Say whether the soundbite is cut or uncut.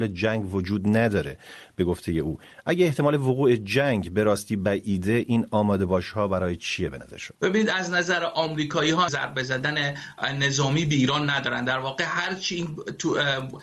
cut